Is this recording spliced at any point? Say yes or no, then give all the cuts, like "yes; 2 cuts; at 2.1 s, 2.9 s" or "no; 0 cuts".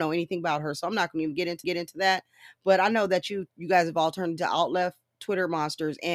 yes; 1 cut; at 1.6 s